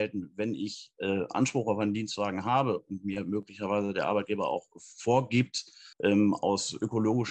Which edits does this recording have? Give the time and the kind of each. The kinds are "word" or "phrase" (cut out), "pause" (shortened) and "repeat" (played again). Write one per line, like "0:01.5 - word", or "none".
0:05.9 - pause